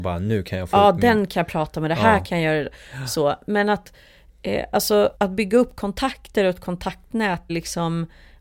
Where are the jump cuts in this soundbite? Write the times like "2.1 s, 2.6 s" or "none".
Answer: 5.2 s, 7.5 s